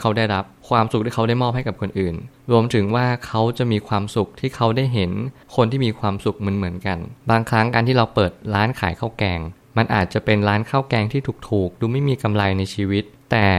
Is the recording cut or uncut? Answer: cut